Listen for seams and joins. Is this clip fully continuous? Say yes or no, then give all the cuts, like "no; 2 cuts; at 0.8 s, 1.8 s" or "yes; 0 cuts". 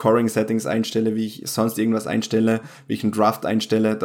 yes; 0 cuts